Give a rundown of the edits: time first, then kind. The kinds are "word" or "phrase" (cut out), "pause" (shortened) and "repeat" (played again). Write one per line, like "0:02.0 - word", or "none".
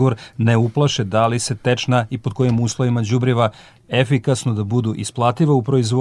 none